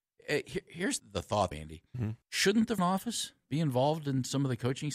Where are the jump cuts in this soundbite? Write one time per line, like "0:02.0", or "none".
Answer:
0:01.0
0:01.5
0:02.2
0:02.8